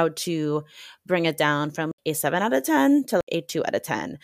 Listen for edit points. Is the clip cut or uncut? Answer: uncut